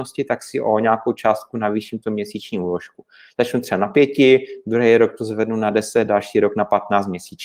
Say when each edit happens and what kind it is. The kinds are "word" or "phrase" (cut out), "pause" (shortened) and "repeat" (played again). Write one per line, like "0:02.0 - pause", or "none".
none